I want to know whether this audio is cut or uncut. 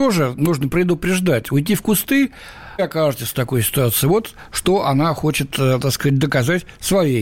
cut